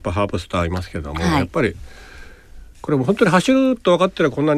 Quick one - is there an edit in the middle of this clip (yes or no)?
no